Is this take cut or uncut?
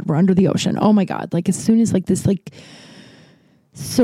uncut